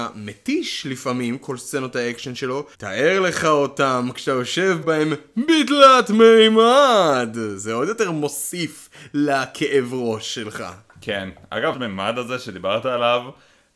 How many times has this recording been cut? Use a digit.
3